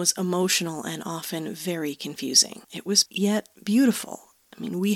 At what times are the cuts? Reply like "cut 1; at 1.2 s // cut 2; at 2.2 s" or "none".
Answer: cut 1; at 2.6 s // cut 2; at 3.1 s